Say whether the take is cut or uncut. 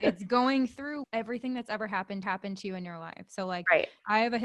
cut